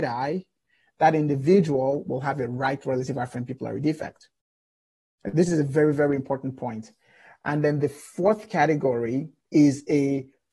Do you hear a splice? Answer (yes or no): no